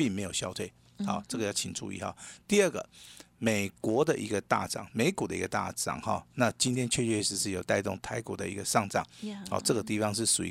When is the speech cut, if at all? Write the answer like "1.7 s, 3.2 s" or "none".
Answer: none